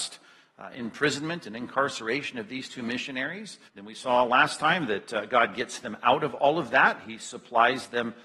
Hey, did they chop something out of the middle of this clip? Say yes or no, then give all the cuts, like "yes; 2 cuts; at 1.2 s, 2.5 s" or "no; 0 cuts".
yes; 1 cut; at 3.7 s